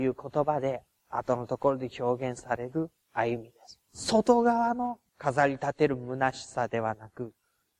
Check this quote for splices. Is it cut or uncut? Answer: cut